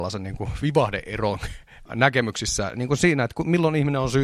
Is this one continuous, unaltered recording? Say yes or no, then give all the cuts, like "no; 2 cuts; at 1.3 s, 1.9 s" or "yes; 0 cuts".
yes; 0 cuts